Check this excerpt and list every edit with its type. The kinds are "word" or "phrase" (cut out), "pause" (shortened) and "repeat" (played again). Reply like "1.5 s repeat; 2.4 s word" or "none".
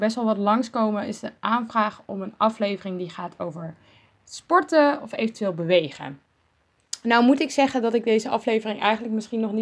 none